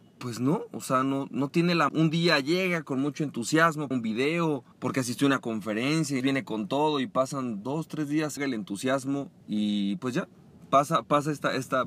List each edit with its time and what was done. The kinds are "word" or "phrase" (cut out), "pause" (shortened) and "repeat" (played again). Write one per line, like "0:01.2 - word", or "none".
0:01.3 - word
0:01.9 - word
0:03.9 - phrase
0:04.7 - pause
0:06.2 - word
0:08.4 - phrase
0:09.4 - pause